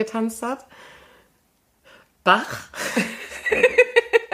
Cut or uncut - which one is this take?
uncut